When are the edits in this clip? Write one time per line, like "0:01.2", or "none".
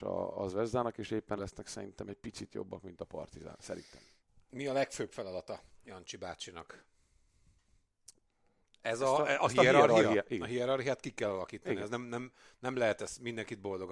0:01.4